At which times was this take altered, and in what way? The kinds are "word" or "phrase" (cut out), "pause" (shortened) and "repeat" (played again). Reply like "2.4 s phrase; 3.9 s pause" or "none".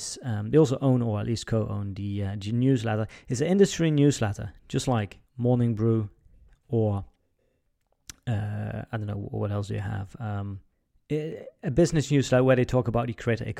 5.3 s pause; 10.7 s pause